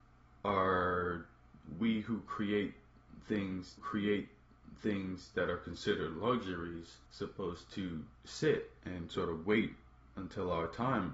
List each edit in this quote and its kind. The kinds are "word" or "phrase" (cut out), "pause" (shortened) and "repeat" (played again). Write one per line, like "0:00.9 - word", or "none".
0:03.8 - repeat
0:07.1 - pause